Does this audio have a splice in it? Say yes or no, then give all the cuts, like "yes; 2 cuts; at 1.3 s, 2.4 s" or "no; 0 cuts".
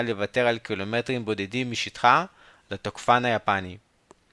no; 0 cuts